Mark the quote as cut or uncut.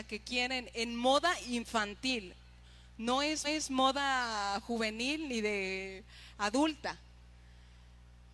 cut